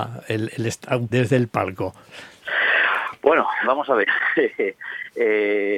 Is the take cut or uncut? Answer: cut